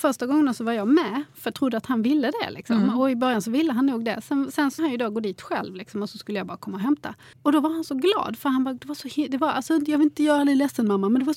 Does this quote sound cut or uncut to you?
cut